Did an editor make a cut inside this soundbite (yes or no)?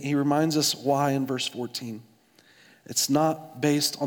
no